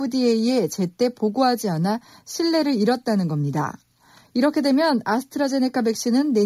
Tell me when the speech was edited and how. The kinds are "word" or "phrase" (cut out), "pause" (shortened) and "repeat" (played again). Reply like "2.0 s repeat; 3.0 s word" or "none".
none